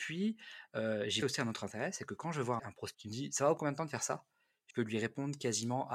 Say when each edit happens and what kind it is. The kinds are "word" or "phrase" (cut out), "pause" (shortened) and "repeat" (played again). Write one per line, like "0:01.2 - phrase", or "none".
0:01.2 - word
0:02.6 - word
0:02.9 - word
0:03.6 - word
0:04.7 - word